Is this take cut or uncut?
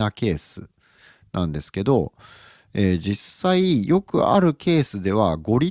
uncut